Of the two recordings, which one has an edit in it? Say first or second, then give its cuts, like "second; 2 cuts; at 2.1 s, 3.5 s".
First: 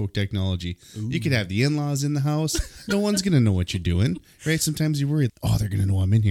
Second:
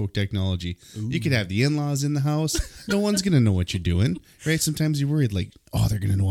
first; 1 cut; at 5.3 s